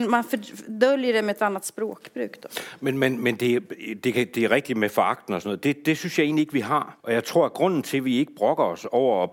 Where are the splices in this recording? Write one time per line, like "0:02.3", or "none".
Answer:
0:07.0